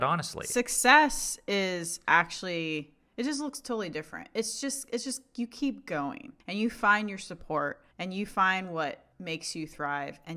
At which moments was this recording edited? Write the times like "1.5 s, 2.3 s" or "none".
6.4 s, 7.9 s, 9.1 s